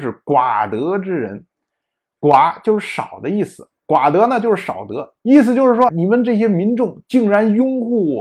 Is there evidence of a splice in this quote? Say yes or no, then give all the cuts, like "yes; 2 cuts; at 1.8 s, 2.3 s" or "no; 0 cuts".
yes; 2 cuts; at 5.2 s, 5.9 s